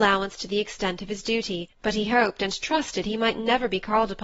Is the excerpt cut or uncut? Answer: cut